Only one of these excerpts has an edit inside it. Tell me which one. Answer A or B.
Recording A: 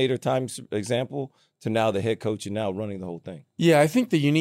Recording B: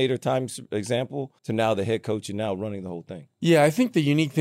B